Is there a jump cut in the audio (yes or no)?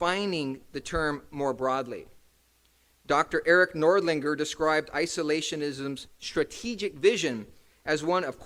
no